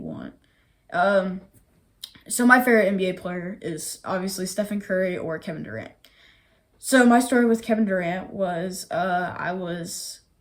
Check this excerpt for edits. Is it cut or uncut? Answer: uncut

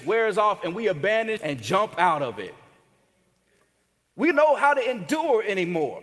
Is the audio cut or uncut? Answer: cut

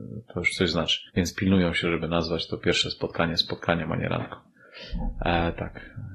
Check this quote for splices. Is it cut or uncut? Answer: cut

